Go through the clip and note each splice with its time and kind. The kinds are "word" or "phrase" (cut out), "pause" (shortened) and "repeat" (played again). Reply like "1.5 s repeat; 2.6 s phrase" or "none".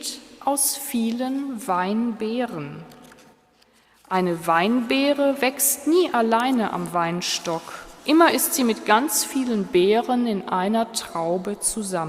8.0 s pause

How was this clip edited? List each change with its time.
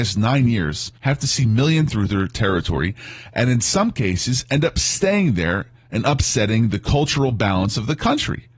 1.0 s pause; 1.9 s phrase

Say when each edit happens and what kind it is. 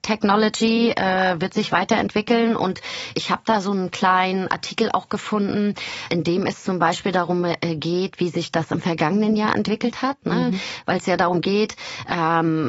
3.1 s word; 6.1 s word

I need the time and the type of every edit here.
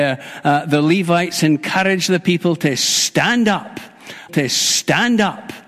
4.3 s repeat

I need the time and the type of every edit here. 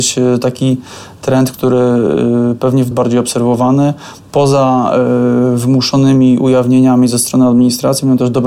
2.9 s phrase

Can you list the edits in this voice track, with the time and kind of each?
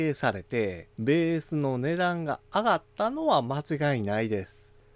0.9 s pause

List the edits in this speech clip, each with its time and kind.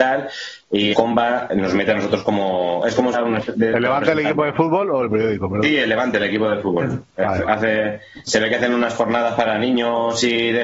0.9 s word; 3.1 s phrase

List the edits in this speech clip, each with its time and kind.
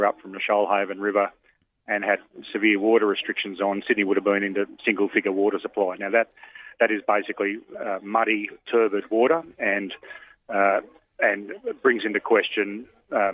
none

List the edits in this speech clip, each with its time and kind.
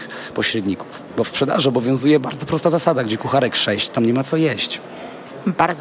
none

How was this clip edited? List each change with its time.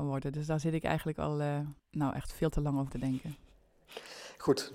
1.8 s pause; 2.9 s word

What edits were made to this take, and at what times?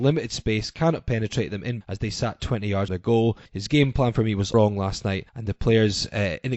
1.8 s word; 2.9 s word; 3.5 s pause; 4.5 s word; 5.3 s pause

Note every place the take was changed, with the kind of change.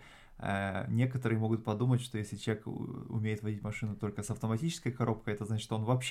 none

